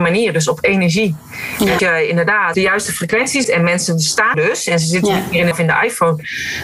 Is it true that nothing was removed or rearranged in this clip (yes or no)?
no